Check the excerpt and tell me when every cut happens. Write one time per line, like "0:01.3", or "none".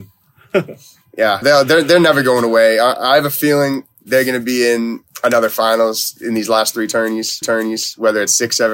0:01.4
0:07.4